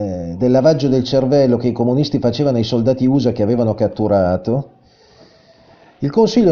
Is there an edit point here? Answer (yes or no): no